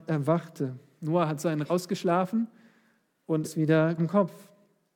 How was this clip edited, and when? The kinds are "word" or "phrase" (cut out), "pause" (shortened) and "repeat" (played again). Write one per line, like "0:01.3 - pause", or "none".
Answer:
0:01.6 - word
0:03.4 - word
0:04.0 - word